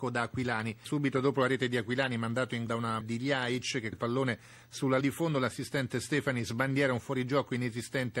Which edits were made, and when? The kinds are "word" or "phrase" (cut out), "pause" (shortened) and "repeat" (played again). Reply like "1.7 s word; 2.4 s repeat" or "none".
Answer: 2.7 s word; 3.0 s word; 3.9 s word; 5.0 s word